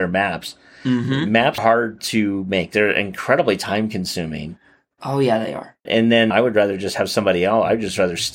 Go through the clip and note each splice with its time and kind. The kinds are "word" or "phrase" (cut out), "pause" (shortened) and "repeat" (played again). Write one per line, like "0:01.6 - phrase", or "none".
0:01.6 - word
0:05.9 - word
0:06.3 - word